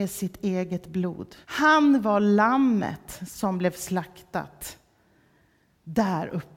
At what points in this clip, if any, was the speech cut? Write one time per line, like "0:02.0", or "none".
0:01.4